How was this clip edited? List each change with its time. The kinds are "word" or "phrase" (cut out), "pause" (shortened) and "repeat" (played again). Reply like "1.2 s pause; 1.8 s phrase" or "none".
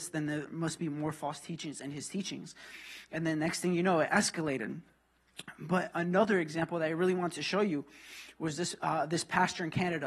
none